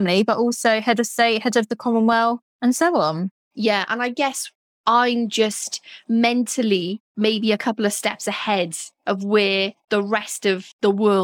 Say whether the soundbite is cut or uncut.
uncut